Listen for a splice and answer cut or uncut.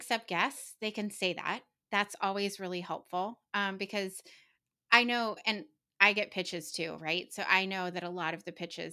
uncut